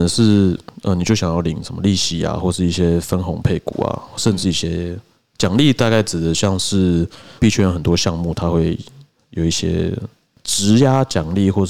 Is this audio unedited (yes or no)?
no